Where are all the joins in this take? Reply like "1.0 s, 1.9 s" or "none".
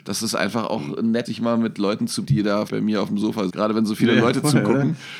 1.2 s, 2.2 s, 2.7 s, 3.5 s